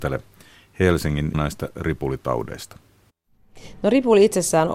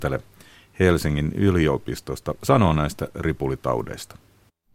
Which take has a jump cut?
first; 1 cut; at 1.3 s

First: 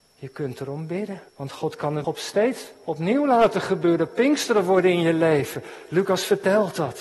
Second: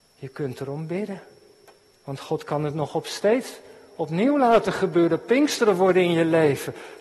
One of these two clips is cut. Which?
first; 3 cuts; at 1.3 s, 2.0 s, 2.7 s

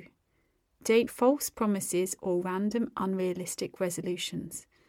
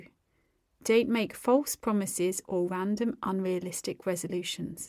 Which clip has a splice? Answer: first; 1 cut; at 1.1 s

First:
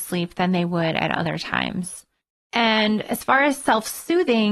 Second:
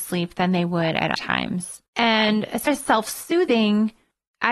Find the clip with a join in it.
second; 3 cuts; at 1.2 s, 1.9 s, 2.7 s

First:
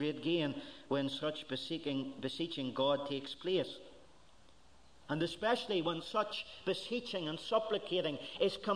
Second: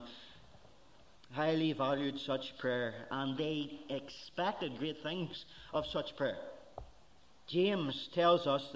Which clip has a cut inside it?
second; 1 cut; at 7.0 s

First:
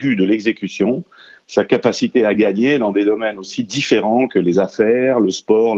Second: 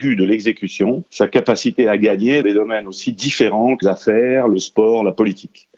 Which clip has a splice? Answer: second; 3 cuts; at 1.1 s, 2.4 s, 3.8 s

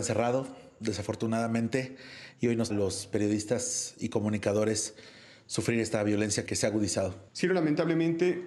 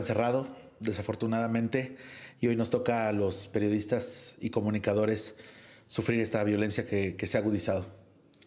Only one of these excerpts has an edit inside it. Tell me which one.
first; 3 cuts; at 2.7 s, 6.5 s, 7.3 s

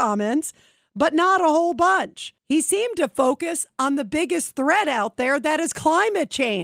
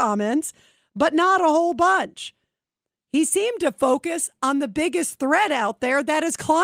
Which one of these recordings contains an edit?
first; 1 cut; at 2.4 s

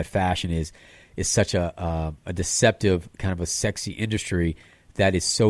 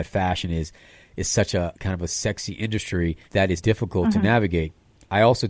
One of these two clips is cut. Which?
second; 3 cuts; at 1.7 s, 3.3 s, 3.6 s

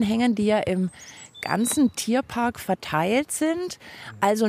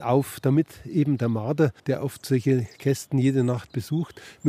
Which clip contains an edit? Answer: second; 1 cut; at 1.8 s

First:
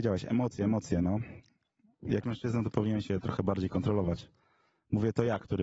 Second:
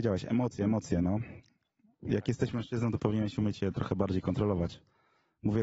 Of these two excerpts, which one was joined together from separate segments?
first; 2 cuts; at 2.2 s, 3.1 s

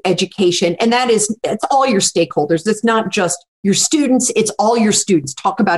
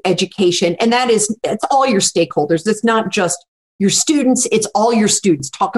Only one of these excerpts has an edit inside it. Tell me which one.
first; 1 cut; at 3.5 s

